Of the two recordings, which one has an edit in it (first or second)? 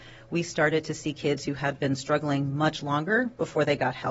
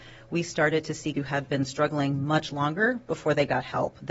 second